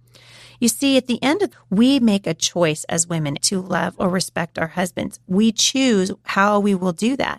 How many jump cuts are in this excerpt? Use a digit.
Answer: 2